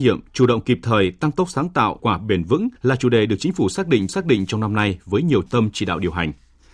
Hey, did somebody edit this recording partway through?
yes; 4 cuts; at 2.0 s, 2.8 s, 4.1 s, 5.5 s

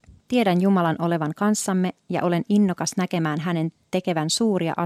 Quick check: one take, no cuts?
yes; 0 cuts

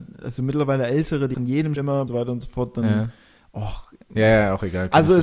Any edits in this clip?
yes; 3 cuts; at 1.3 s, 1.8 s, 2.1 s

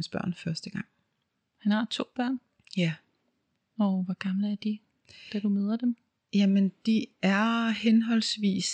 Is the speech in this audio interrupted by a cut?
no; 0 cuts

